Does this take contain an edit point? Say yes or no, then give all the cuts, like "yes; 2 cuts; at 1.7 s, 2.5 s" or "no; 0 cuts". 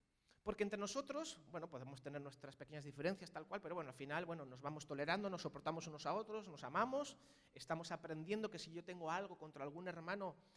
no; 0 cuts